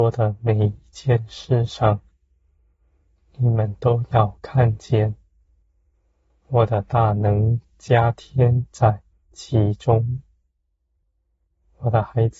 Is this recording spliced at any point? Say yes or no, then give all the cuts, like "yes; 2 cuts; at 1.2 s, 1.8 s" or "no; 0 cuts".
yes; 1 cut; at 9.1 s